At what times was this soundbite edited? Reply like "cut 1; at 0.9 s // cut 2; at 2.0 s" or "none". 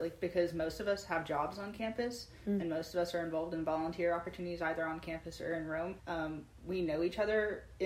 cut 1; at 6.0 s

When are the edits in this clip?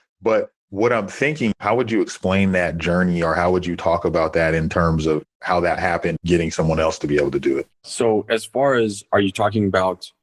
cut 1; at 1.5 s // cut 2; at 6.2 s // cut 3; at 7.7 s

